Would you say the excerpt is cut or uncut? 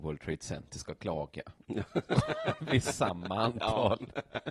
cut